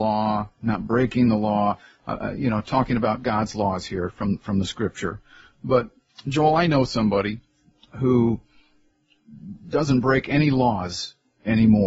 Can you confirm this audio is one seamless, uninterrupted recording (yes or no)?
yes